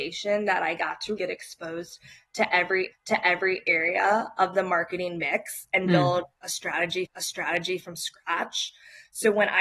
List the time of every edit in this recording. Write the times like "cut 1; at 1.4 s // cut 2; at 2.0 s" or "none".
cut 1; at 1.2 s // cut 2; at 2.9 s // cut 3; at 7.1 s